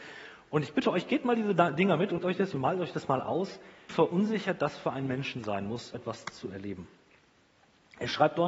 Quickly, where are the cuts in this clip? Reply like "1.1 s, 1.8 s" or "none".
2.2 s, 3.9 s, 5.9 s